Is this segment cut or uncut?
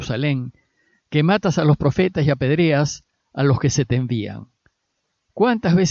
uncut